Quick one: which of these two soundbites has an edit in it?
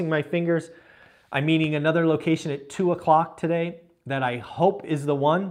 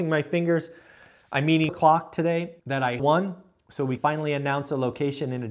second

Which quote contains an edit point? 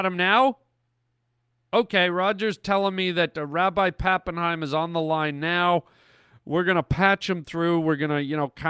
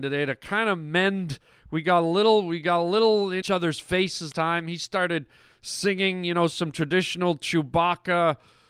second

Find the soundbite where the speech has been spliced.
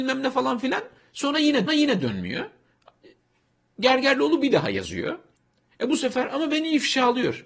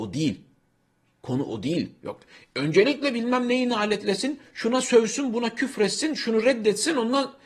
first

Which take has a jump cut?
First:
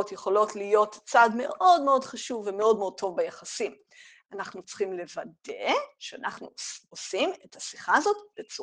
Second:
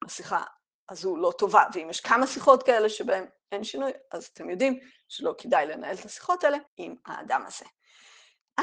second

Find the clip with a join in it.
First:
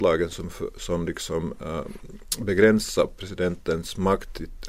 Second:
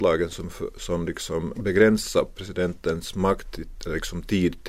second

